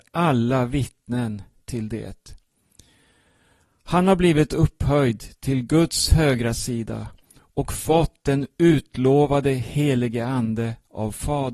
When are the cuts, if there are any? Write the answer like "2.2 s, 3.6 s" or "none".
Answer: none